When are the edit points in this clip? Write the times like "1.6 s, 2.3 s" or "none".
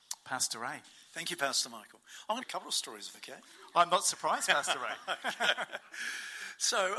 2.4 s, 3.1 s